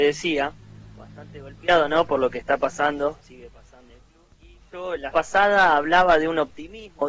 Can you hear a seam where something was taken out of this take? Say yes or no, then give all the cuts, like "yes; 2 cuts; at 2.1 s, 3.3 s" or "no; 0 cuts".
yes; 3 cuts; at 3.9 s, 4.3 s, 5.1 s